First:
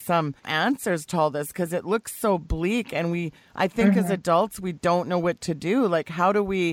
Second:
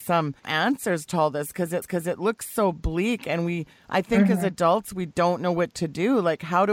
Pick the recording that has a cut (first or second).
second